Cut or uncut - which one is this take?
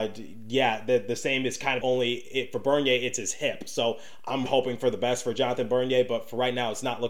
cut